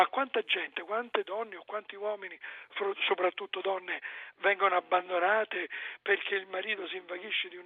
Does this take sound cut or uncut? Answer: uncut